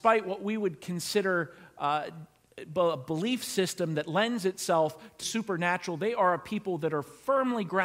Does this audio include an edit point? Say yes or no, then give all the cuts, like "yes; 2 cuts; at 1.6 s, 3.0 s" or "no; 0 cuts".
yes; 1 cut; at 5.2 s